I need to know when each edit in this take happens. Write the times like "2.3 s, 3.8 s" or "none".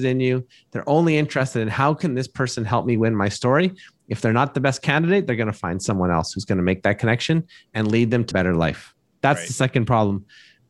8.3 s